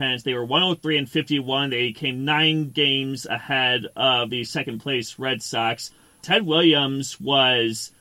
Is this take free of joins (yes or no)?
yes